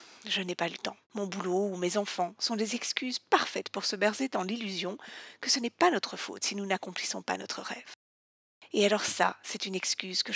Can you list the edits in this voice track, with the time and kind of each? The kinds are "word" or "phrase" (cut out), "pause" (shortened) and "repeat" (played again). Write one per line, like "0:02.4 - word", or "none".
0:01.0 - pause